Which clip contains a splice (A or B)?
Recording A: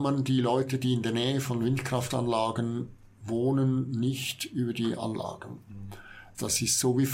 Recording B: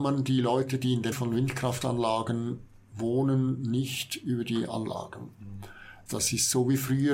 B